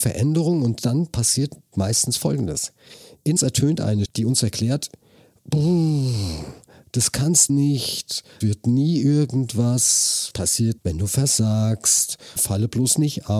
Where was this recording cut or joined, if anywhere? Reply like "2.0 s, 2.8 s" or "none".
1.7 s, 3.4 s, 4.1 s, 7.5 s, 8.4 s, 10.3 s, 10.8 s, 12.4 s